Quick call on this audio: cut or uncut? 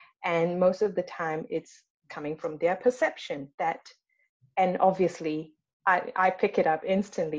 uncut